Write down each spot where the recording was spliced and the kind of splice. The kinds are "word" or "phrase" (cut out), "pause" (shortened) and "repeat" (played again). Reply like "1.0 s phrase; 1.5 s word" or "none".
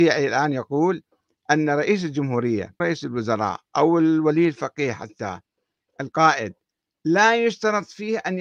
2.8 s word